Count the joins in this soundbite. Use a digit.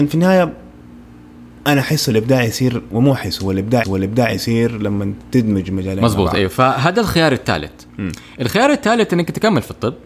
1